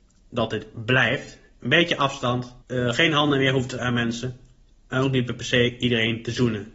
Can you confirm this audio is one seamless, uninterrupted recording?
no; 2 cuts; at 2.6 s, 3.8 s

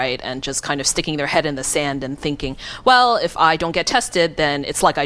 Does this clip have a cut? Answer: no; 0 cuts

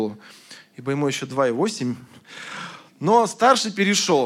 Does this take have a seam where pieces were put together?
no; 0 cuts

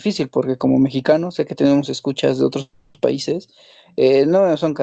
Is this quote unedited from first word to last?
yes; 0 cuts

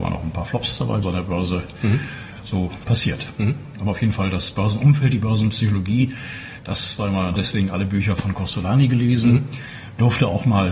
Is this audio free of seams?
no; 2 cuts; at 1.0 s, 7.4 s

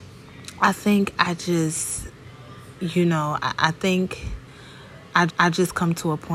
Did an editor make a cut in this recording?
yes; 1 cut; at 5.3 s

